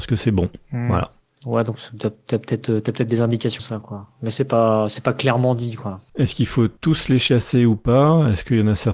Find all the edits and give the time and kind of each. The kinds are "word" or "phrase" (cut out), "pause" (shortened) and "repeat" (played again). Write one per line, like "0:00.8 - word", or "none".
0:03.6 - word
0:06.8 - pause